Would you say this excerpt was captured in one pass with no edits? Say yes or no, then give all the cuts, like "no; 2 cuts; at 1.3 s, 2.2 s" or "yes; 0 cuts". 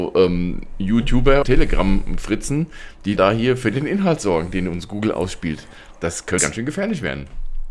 no; 3 cuts; at 1.4 s, 3.2 s, 6.4 s